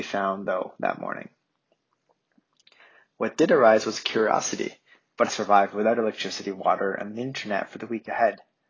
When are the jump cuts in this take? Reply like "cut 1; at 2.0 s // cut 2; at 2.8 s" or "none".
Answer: cut 1; at 5.3 s

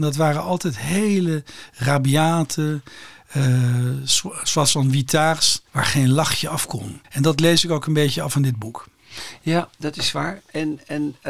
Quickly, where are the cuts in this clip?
cut 1; at 5.7 s // cut 2; at 7.0 s

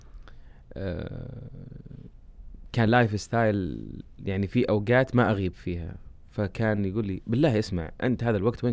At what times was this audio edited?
none

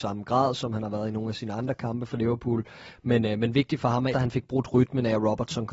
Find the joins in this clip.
cut 1; at 4.1 s

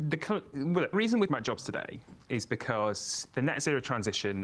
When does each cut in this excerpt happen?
cut 1; at 0.9 s // cut 2; at 1.3 s

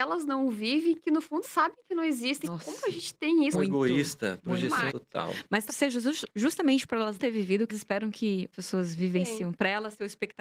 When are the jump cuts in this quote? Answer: cut 1; at 1.4 s // cut 2; at 2.4 s // cut 3; at 3.5 s // cut 4; at 4.9 s // cut 5; at 5.7 s // cut 6; at 7.2 s // cut 7; at 7.7 s // cut 8; at 8.5 s

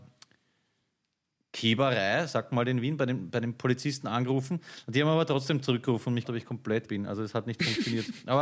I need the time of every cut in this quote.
cut 1; at 6.2 s // cut 2; at 6.9 s

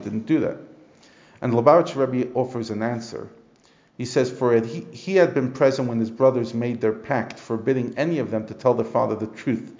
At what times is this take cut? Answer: none

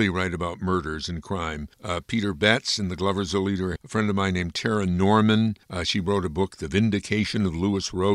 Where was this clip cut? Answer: cut 1; at 1.7 s // cut 2; at 3.8 s // cut 3; at 5.6 s

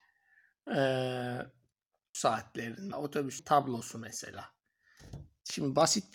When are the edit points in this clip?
cut 1; at 2.1 s // cut 2; at 2.9 s // cut 3; at 3.4 s

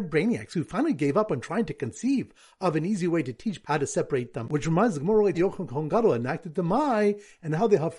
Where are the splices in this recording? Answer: cut 1; at 3.6 s // cut 2; at 4.4 s // cut 3; at 5.3 s

